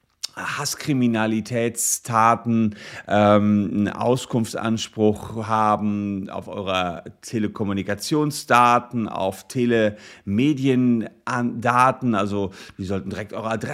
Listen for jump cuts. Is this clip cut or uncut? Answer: uncut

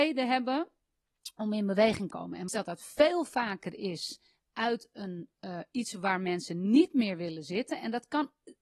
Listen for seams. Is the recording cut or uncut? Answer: cut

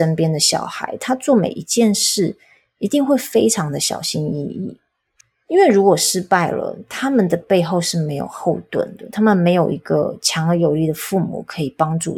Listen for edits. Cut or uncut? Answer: uncut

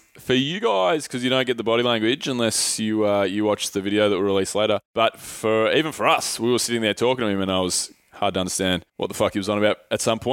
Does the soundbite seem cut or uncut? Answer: cut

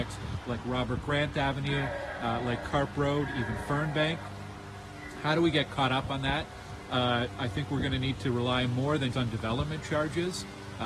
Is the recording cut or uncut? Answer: cut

